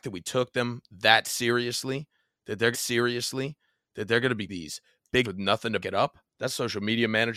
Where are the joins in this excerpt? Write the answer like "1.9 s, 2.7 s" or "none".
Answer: 2.7 s, 4.5 s, 5.2 s, 5.8 s, 6.3 s